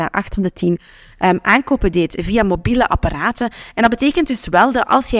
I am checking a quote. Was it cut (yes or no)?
no